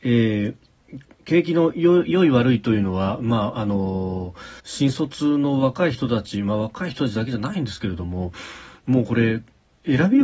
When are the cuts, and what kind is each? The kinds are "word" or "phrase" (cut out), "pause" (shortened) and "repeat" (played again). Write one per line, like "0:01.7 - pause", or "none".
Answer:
0:04.6 - pause

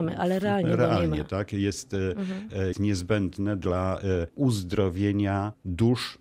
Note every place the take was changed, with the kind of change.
0:02.7 - word

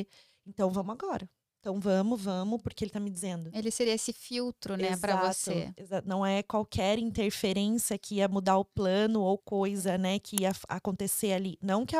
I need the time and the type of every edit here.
0:09.4 - word

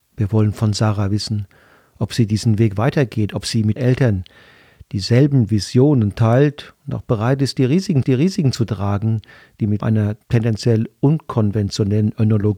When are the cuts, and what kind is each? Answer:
0:03.8 - word
0:08.0 - repeat
0:09.8 - word
0:10.2 - pause

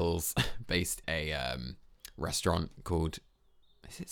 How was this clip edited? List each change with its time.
0:01.0 - word

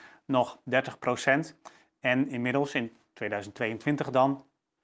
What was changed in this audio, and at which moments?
none

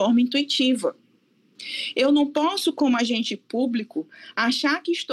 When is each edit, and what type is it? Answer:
none

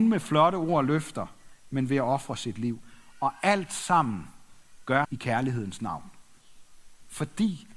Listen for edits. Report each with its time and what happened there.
0:05.0 - word

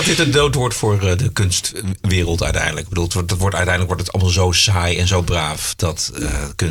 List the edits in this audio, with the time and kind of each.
none

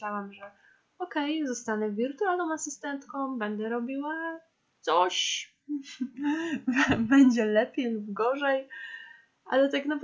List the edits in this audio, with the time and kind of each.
none

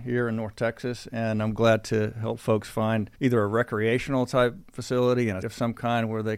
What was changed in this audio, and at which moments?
0:03.1 - pause
0:05.4 - word

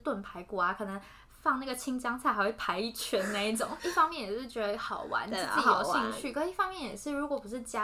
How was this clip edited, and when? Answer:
none

